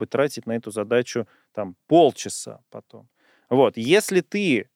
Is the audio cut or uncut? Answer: uncut